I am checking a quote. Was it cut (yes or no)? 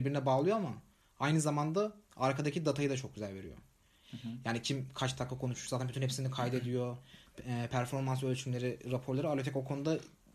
no